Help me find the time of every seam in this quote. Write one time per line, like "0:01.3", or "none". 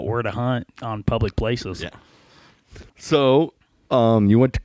0:02.9

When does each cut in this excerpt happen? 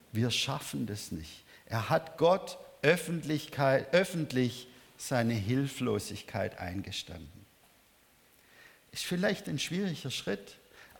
none

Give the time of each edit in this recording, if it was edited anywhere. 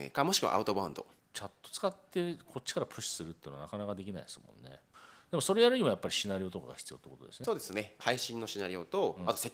none

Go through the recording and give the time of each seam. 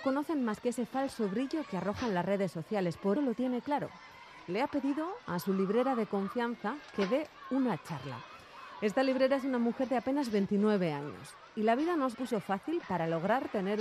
0:03.1
0:12.1

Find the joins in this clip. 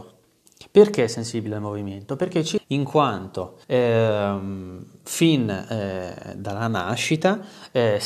0:02.6
0:03.6

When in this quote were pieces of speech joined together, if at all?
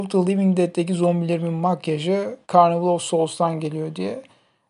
0:02.4

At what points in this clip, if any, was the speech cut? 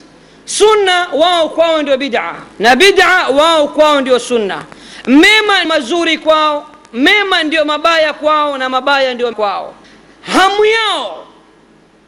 0:02.5
0:05.6
0:09.3
0:09.8

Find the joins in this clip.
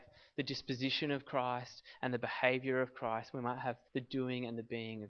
0:03.9

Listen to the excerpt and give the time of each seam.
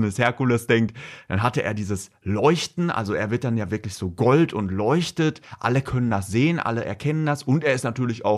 none

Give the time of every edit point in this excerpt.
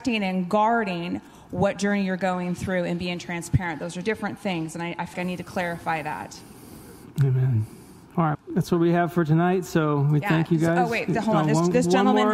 0:04.0
0:05.1
0:08.3

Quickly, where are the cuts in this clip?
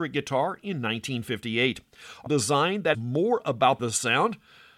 0:02.3
0:02.9
0:03.8

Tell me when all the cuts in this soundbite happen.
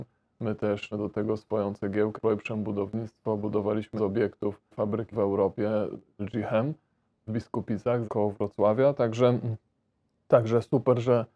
0:00.9
0:02.2
0:04.0
0:04.7
0:05.1
0:06.2
0:07.3
0:08.0

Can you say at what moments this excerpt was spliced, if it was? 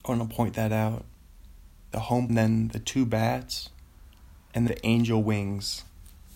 0:01.9
0:02.3
0:04.7

